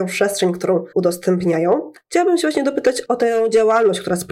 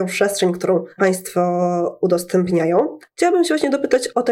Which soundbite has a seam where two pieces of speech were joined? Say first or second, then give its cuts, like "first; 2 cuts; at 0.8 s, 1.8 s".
first; 1 cut; at 0.9 s